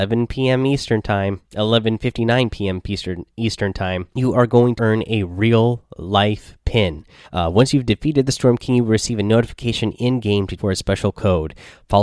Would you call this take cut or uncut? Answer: cut